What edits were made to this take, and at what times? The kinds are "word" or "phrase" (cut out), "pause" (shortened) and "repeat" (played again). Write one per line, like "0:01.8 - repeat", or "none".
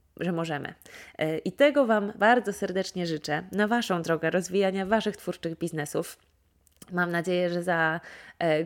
0:02.2 - word